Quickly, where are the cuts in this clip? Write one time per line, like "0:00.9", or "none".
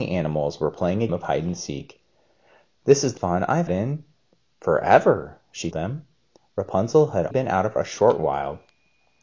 0:01.1
0:03.2
0:03.7
0:05.7
0:07.3
0:07.8